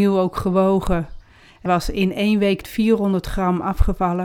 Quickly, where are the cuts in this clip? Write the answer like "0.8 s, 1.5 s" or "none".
1.7 s, 2.6 s

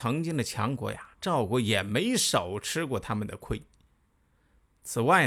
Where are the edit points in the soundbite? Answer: 1.1 s

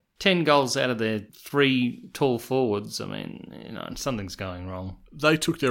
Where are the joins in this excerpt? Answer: 1.3 s

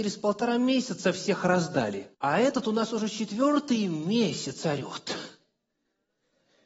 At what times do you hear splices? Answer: 2.1 s

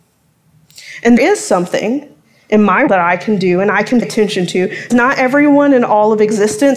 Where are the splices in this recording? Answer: 1.2 s, 2.9 s, 4.0 s, 4.9 s

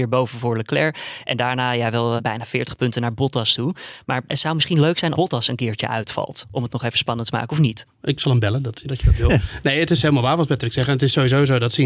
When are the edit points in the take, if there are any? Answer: 2.2 s, 4.3 s, 5.1 s, 8.2 s, 8.8 s

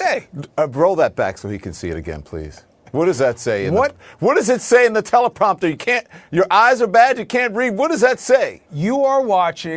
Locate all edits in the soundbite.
8.7 s

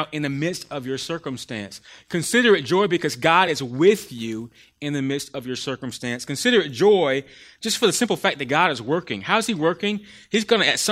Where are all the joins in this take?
none

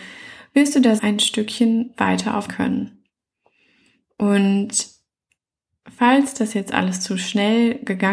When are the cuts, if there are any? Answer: 1.0 s, 2.5 s

